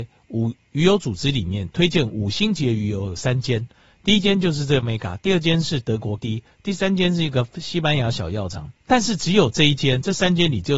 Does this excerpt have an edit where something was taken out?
yes; 3 cuts; at 4.8 s, 6.2 s, 8.8 s

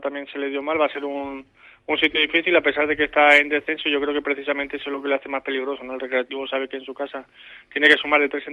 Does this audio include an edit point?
no; 0 cuts

